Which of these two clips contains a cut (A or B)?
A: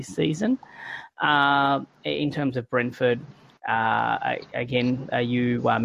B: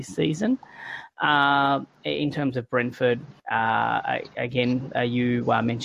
B